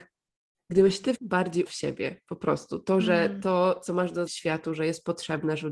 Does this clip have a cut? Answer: yes; 3 cuts; at 1.1 s, 1.7 s, 4.3 s

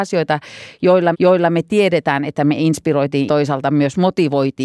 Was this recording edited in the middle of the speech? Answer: yes; 2 cuts; at 1.1 s, 3.3 s

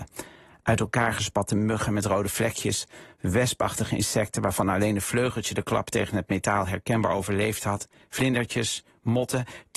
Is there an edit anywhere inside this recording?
no; 0 cuts

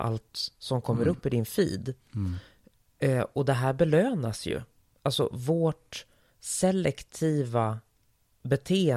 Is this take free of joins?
yes; 0 cuts

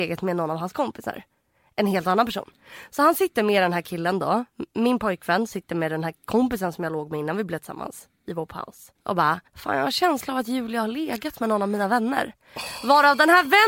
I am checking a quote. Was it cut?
yes; 2 cuts; at 9.0 s, 9.5 s

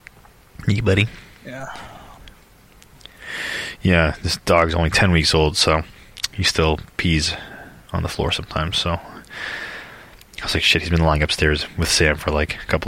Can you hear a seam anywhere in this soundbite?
no; 0 cuts

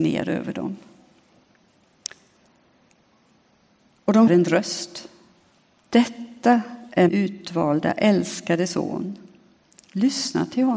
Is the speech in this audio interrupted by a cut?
yes; 2 cuts; at 4.3 s, 7.1 s

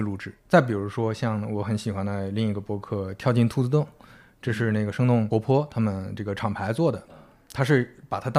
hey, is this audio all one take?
yes; 0 cuts

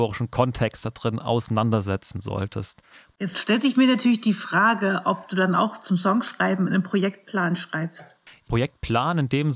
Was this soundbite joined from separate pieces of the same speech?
no; 0 cuts

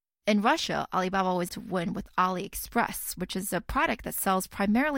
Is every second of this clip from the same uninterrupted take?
no; 1 cut; at 1.5 s

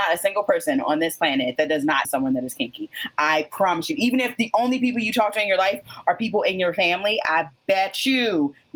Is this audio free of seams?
no; 1 cut; at 2.0 s

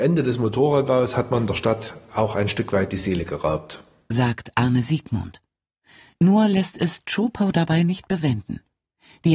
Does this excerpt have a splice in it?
no; 0 cuts

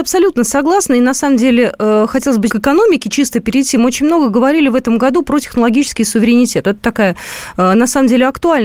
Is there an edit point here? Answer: yes; 1 cut; at 2.5 s

